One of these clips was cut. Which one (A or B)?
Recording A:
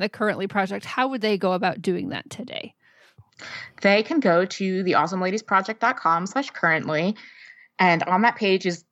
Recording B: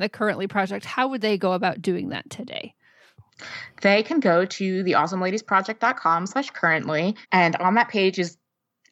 B